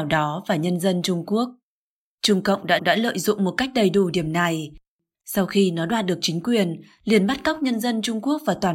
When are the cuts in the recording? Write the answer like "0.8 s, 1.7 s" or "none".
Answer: 2.8 s